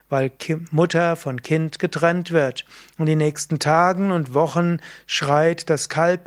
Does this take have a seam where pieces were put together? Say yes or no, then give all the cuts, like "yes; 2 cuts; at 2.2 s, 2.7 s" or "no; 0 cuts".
no; 0 cuts